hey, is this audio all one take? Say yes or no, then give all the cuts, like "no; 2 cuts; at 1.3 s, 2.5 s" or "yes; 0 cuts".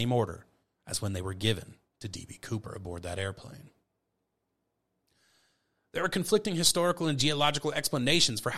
yes; 0 cuts